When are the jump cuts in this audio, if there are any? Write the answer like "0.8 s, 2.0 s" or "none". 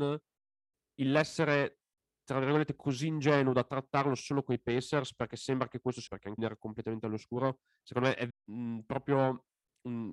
6.1 s, 6.4 s, 8.3 s